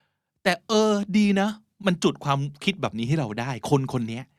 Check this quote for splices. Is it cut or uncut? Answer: uncut